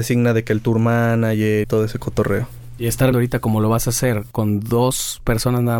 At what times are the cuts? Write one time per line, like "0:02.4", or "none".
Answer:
0:01.6
0:03.1

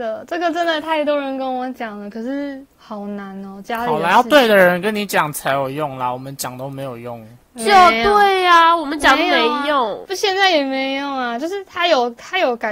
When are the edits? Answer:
0:10.1

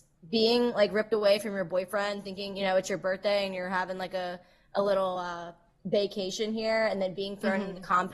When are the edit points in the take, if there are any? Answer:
none

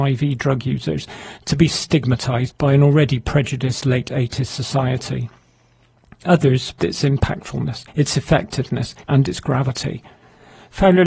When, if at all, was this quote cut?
0:02.5
0:06.8
0:07.9
0:09.0

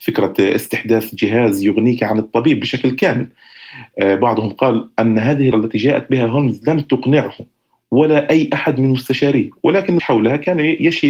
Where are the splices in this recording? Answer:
0:05.5
0:10.0

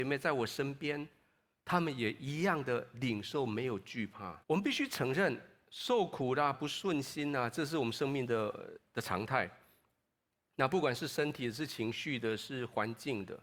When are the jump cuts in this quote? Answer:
0:04.4
0:06.5

